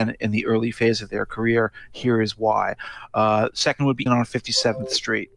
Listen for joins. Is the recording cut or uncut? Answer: cut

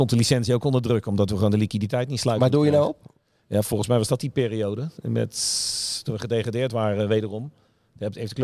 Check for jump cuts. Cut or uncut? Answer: uncut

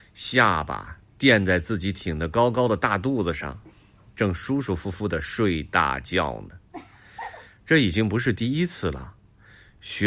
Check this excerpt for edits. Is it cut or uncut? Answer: uncut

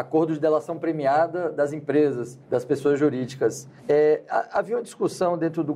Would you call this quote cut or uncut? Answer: cut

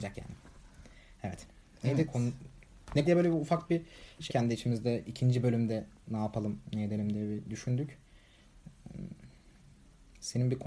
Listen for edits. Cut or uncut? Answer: cut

